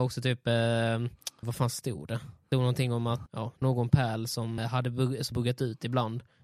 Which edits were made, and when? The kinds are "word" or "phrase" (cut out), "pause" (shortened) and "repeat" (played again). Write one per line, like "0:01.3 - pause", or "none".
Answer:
0:01.4 - word
0:02.5 - word
0:03.3 - word
0:03.6 - word
0:04.6 - word
0:05.3 - word